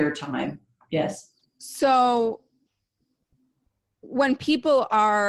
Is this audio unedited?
yes; 0 cuts

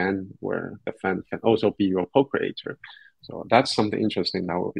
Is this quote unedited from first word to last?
yes; 0 cuts

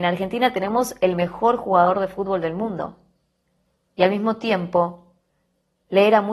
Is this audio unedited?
yes; 0 cuts

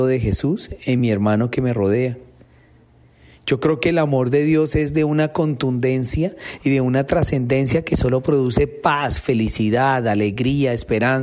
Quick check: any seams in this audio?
no; 0 cuts

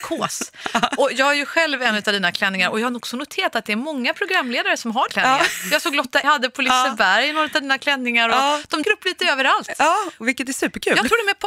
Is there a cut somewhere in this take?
yes; 3 cuts; at 5.1 s, 6.2 s, 8.8 s

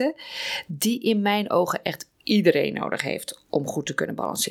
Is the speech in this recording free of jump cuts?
yes; 0 cuts

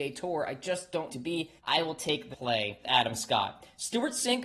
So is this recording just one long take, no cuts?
no; 4 cuts; at 1.1 s, 1.6 s, 2.3 s, 2.8 s

